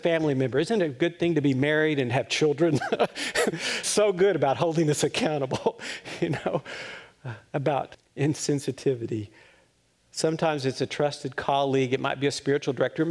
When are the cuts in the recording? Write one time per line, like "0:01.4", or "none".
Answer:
0:03.8
0:07.9

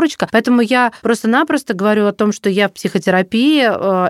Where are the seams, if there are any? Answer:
none

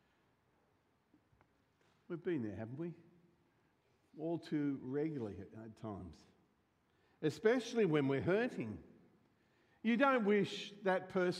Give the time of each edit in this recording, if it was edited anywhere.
none

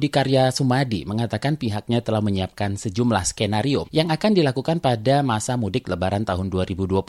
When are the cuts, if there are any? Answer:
0:03.8

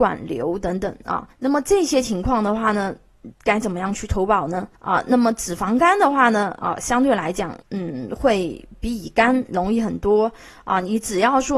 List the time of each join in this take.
0:01.3
0:03.3
0:04.7
0:07.6

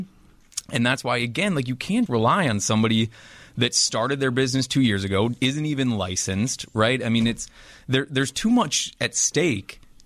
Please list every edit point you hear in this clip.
0:02.1

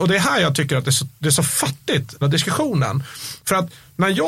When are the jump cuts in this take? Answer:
0:02.2

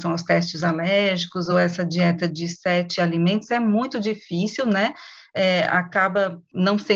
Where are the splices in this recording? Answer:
none

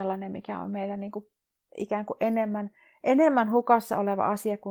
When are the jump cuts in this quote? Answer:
none

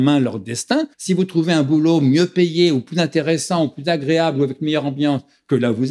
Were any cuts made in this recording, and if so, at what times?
0:00.9

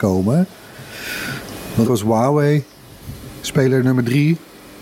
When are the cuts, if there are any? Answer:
0:01.8

